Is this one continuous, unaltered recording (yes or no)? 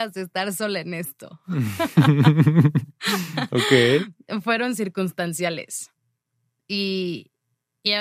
yes